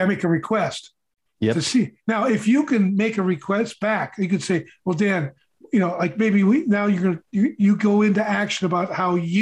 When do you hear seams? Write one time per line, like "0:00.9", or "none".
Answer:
none